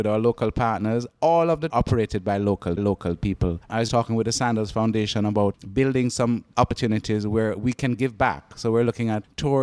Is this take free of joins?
no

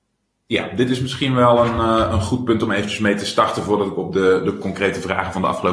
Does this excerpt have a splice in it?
no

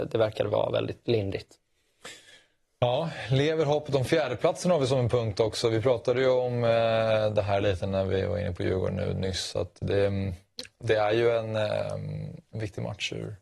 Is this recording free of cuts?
yes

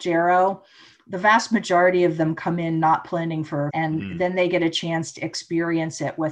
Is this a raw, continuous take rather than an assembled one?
no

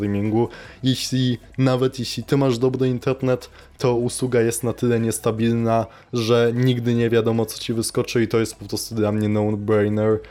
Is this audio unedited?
yes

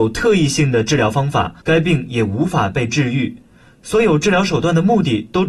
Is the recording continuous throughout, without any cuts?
no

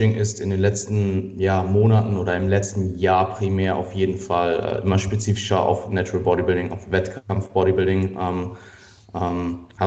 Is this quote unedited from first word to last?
yes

